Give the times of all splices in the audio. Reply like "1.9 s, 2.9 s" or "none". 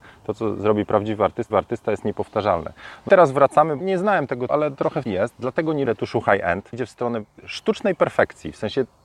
1.5 s, 3.1 s, 3.8 s, 4.5 s, 5.1 s, 5.9 s, 6.7 s